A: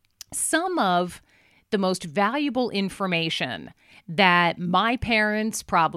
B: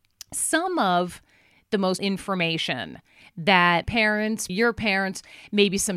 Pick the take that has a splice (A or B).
B